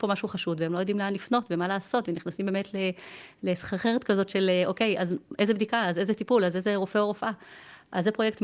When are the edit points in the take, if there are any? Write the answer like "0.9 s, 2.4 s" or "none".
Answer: none